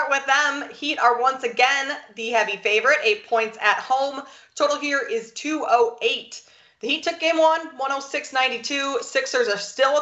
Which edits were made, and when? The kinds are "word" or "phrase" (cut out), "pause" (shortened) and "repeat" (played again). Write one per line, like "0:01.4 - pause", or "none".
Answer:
none